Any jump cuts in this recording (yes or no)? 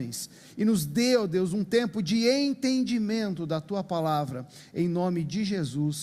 no